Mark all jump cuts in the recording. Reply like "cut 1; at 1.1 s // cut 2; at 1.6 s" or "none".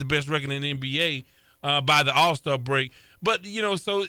none